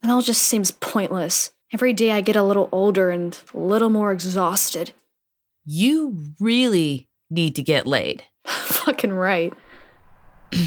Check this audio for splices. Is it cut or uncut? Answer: cut